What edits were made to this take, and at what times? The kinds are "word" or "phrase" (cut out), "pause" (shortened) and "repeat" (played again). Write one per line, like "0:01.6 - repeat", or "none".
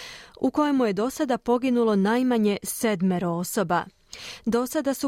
none

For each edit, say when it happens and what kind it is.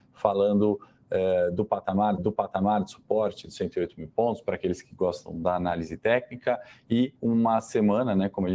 0:02.2 - repeat
0:07.2 - pause

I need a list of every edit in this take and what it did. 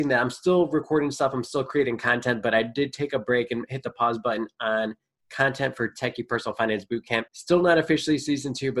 0:07.3 - pause

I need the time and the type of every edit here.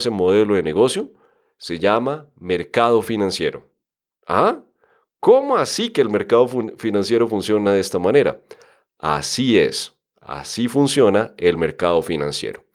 none

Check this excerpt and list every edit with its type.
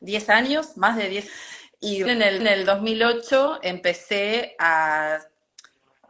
0:01.3 - word
0:02.1 - word
0:02.4 - repeat

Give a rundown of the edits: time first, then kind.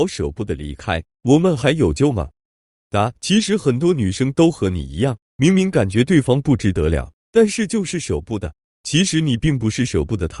0:03.2 - pause
0:08.7 - pause

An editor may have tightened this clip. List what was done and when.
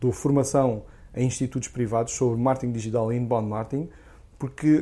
none

